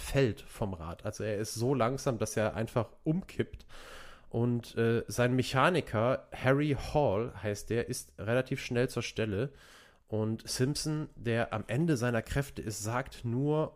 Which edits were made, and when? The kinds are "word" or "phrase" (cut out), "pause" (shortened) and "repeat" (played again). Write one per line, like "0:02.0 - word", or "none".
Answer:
none